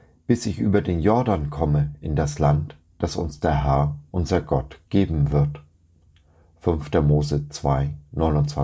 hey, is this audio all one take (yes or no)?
yes